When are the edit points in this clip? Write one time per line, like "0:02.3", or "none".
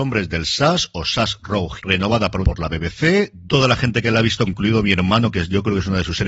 0:01.8
0:02.4
0:04.5

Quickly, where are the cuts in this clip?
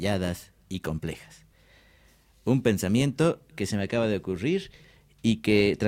none

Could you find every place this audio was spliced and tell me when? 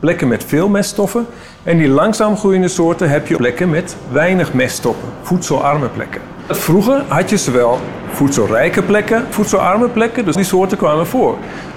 0:03.4
0:09.3
0:10.4

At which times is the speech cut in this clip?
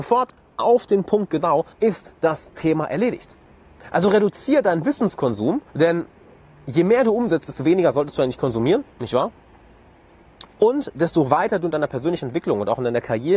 0:01.7
0:05.7
0:08.9

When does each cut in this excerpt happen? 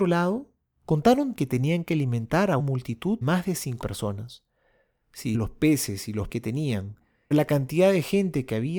0:01.3
0:02.6
0:03.2
0:03.8
0:05.3
0:06.3
0:07.3

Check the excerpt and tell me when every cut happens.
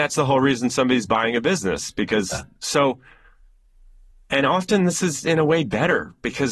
none

